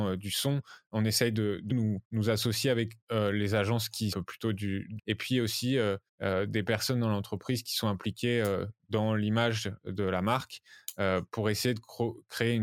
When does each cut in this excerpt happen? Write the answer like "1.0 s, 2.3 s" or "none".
1.7 s, 2.0 s, 3.0 s, 4.1 s, 5.0 s, 6.1 s